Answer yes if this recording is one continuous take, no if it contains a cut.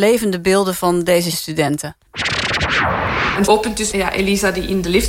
no